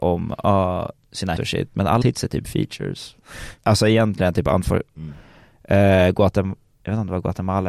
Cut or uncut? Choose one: cut